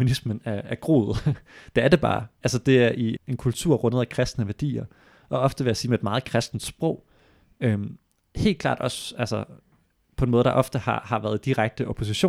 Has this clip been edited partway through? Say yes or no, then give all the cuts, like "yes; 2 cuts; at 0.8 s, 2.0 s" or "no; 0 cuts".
yes; 1 cut; at 3.2 s